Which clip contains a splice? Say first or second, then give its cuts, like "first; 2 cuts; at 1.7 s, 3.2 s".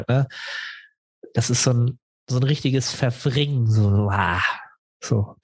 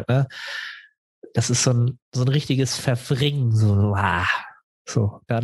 second; 1 cut; at 2.0 s